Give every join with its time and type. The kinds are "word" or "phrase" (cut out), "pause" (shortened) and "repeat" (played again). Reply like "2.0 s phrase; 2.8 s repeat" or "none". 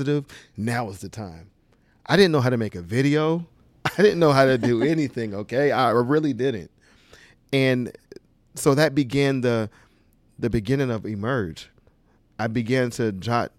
none

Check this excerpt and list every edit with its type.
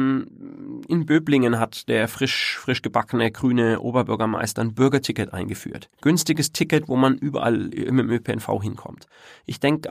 5.9 s pause

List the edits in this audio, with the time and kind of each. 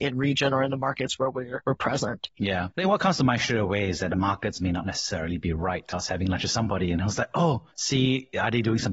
none

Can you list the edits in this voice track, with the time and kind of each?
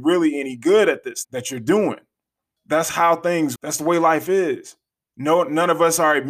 1.2 s word; 2.6 s word; 3.6 s word

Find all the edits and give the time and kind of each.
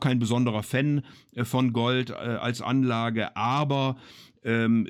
none

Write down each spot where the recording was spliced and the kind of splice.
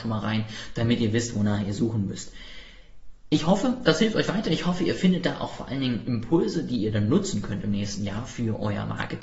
none

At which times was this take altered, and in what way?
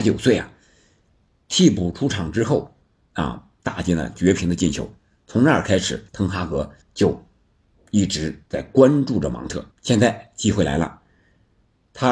3.5 s pause; 6.1 s pause; 6.8 s pause; 8.5 s pause; 9.7 s pause

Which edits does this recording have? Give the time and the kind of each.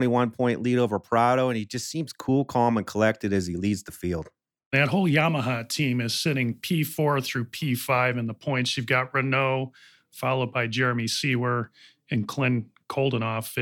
none

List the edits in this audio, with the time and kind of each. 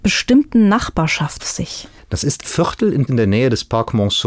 1.4 s word; 2.4 s word; 3.1 s word

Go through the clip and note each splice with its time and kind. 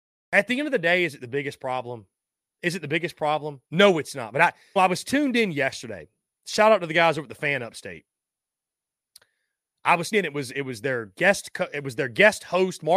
3.6 s pause; 4.8 s phrase; 10.1 s word

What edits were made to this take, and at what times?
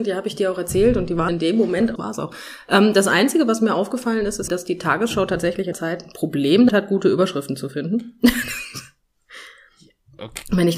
1.3 s word; 2.0 s phrase; 4.5 s word; 5.7 s word; 6.7 s word

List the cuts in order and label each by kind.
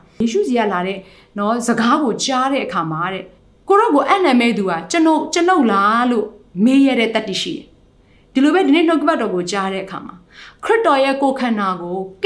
3.4 s pause

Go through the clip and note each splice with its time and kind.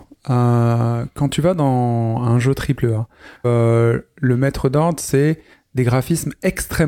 3.4 s word

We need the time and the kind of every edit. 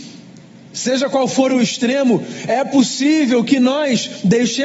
none

